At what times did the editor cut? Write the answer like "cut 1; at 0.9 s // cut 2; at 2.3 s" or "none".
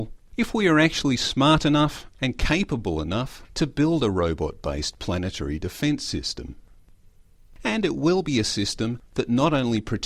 none